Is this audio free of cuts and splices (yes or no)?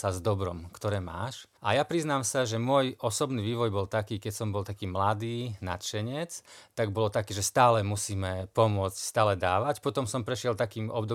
no